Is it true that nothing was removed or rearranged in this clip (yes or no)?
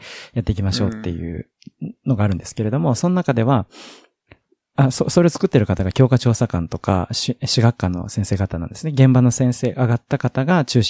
yes